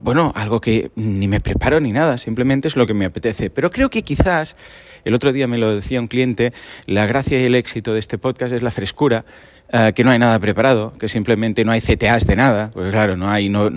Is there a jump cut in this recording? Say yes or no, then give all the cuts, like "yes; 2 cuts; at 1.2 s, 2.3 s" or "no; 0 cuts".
no; 0 cuts